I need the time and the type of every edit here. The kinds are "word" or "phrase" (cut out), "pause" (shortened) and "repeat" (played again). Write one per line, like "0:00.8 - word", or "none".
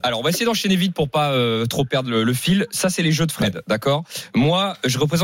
none